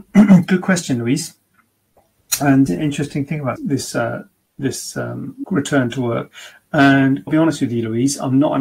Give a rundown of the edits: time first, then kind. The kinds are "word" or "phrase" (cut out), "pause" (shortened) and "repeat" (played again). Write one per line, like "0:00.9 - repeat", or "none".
0:02.7 - word
0:03.6 - word
0:04.5 - pause
0:05.4 - word
0:07.3 - word